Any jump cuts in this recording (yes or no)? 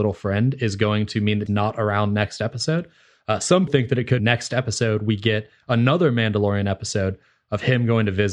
yes